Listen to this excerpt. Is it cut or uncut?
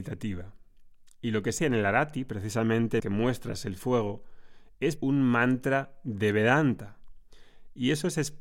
cut